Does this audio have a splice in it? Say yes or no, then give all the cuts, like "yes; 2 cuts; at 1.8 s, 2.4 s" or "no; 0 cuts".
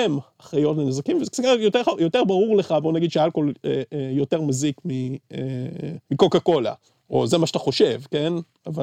yes; 2 cuts; at 6.0 s, 6.9 s